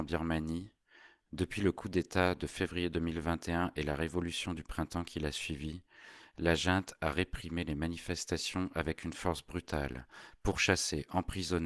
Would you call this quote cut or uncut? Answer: uncut